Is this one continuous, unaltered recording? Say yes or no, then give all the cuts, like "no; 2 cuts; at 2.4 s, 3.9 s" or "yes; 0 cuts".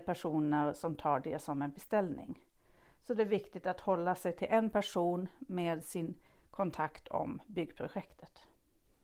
yes; 0 cuts